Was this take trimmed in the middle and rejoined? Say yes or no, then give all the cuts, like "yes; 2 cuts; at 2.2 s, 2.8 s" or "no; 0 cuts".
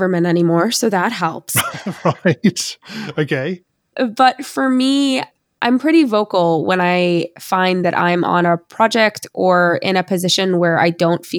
no; 0 cuts